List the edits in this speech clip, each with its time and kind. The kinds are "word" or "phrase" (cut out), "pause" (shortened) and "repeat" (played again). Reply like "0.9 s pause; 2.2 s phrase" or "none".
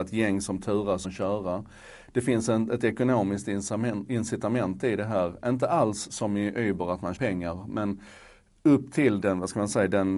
1.0 s word; 7.2 s word; 9.2 s word

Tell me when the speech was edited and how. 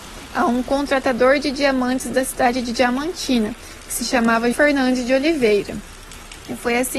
4.5 s word

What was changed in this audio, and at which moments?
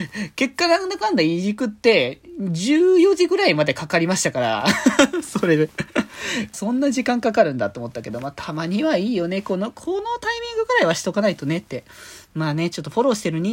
6.5 s phrase

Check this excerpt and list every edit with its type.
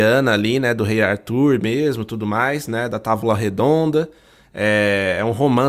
none

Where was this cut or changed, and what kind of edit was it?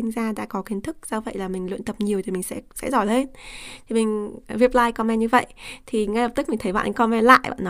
2.7 s pause

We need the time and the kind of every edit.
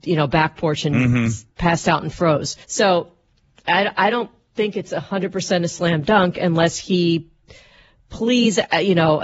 1.5 s pause; 2.6 s pause

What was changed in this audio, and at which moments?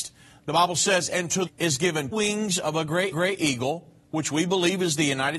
1.5 s phrase; 2.1 s word; 3.1 s repeat

